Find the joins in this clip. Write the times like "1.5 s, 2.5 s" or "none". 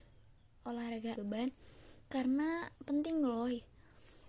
1.1 s, 2.8 s